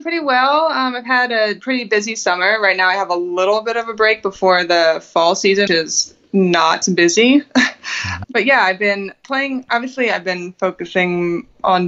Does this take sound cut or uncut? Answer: cut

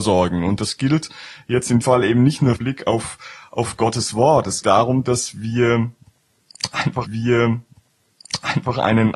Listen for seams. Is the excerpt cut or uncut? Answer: cut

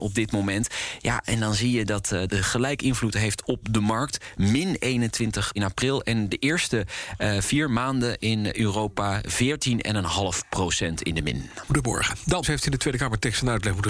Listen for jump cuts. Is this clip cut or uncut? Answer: cut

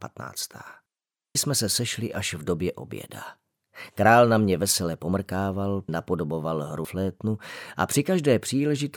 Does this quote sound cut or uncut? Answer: cut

